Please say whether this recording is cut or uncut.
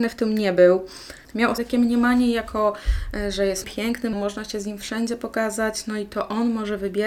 cut